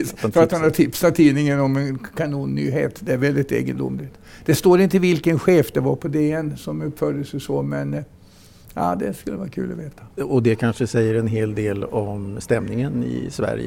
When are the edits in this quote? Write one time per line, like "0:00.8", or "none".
0:10.1